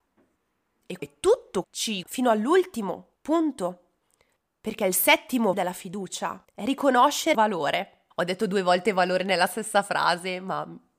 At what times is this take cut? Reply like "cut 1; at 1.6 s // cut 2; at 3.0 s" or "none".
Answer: cut 1; at 1.0 s // cut 2; at 1.6 s // cut 3; at 2.0 s // cut 4; at 3.2 s // cut 5; at 5.5 s // cut 6; at 6.4 s // cut 7; at 7.3 s // cut 8; at 8.1 s